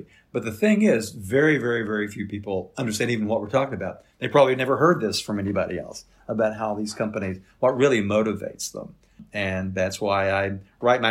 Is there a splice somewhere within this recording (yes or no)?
no